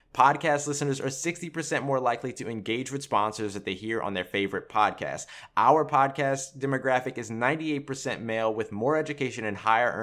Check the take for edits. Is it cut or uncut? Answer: uncut